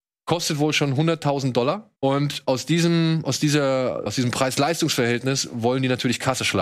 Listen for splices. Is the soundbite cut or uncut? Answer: cut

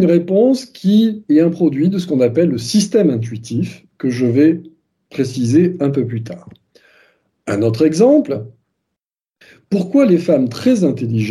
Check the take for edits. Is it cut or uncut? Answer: uncut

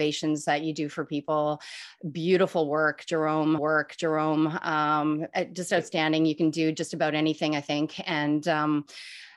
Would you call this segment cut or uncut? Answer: cut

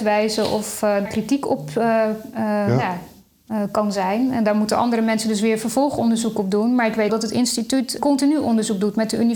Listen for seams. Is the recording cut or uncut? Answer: cut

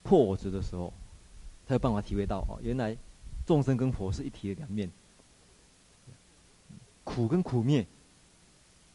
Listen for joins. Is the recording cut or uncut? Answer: cut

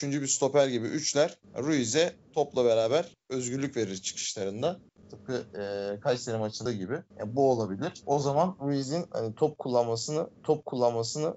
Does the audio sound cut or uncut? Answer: cut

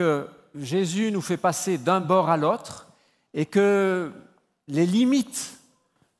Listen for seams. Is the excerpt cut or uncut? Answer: uncut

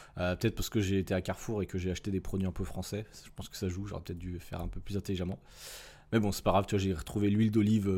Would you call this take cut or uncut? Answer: uncut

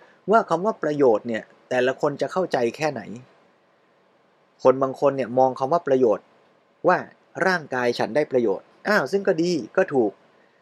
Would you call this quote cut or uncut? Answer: uncut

